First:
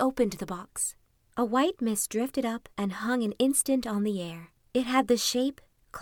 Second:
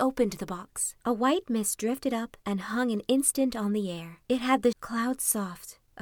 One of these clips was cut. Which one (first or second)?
second